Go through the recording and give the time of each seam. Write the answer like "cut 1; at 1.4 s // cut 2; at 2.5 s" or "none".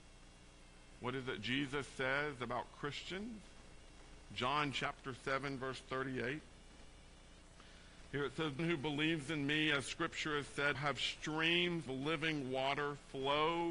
cut 1; at 8.6 s // cut 2; at 10.7 s // cut 3; at 11.9 s